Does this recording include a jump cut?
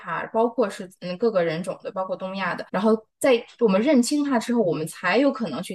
yes; 2 cuts; at 2.7 s, 3.1 s

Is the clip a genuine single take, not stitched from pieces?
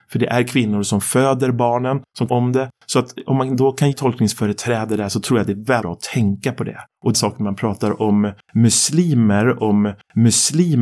no; 5 cuts; at 2.3 s, 3.9 s, 5.8 s, 7.1 s, 9.6 s

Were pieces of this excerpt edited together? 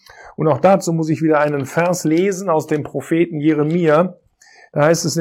no; 0 cuts

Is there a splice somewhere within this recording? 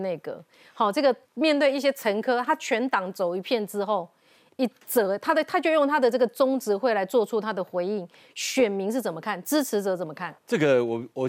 yes; 2 cuts; at 1.2 s, 10.4 s

